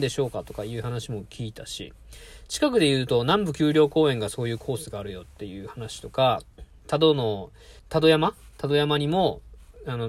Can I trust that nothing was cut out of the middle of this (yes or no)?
no